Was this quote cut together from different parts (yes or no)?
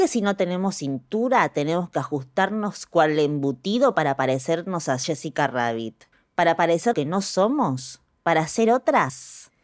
yes